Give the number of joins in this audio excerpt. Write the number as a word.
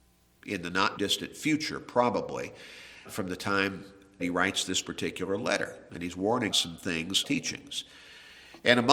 five